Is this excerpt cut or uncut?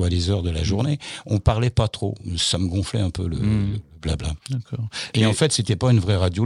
cut